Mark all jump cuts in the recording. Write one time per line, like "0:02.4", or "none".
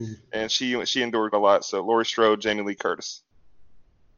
0:01.3